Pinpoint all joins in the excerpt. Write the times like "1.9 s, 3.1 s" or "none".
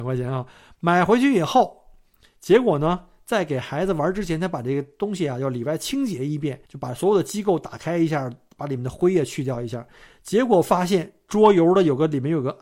6.7 s